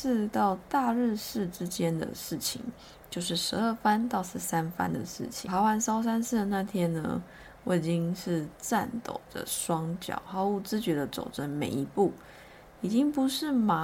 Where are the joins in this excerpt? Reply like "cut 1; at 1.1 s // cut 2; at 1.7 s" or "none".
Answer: none